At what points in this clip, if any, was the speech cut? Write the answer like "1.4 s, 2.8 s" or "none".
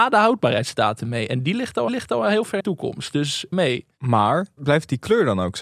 1.9 s, 2.6 s, 3.5 s, 4.6 s